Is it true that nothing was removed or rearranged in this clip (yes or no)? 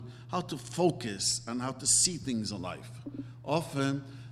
yes